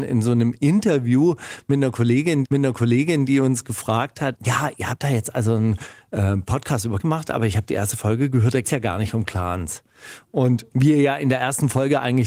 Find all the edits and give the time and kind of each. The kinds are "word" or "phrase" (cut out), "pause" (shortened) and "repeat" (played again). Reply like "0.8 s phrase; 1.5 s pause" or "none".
2.4 s repeat; 4.3 s word; 7.0 s word; 8.6 s word; 10.7 s pause